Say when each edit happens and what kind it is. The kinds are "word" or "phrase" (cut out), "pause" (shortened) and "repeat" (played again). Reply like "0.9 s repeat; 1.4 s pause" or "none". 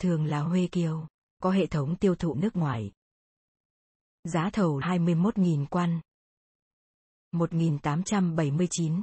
1.4 s word; 2.3 s word; 4.8 s word

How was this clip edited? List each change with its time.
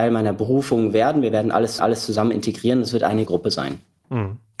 1.8 s repeat; 3.3 s word

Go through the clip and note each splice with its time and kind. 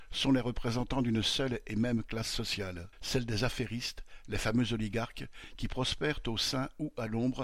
2.9 s pause

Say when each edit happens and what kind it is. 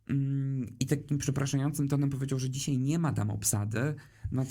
none

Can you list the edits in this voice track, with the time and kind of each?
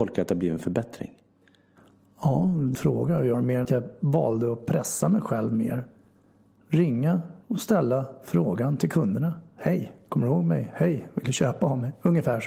2.7 s phrase; 3.3 s phrase; 3.6 s word; 7.4 s pause

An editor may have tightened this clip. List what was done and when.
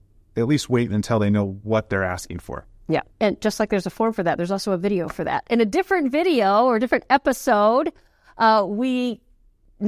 3.1 s pause

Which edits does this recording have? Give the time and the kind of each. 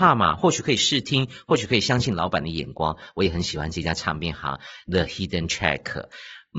none

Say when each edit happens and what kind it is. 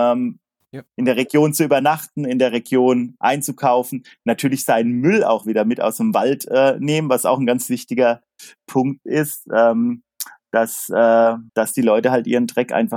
11.5 s pause

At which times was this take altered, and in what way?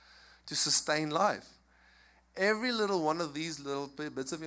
none

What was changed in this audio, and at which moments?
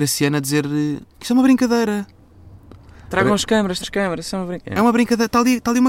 1.1 s pause; 3.8 s word

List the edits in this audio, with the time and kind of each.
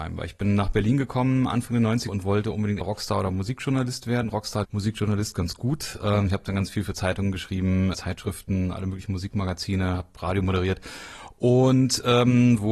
2.1 s word; 2.8 s word; 4.6 s phrase; 7.9 s word

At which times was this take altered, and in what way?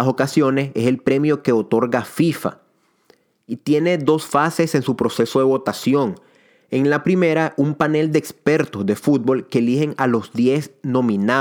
none

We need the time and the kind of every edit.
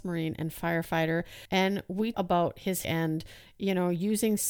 1.5 s pause; 2.1 s word; 2.8 s word

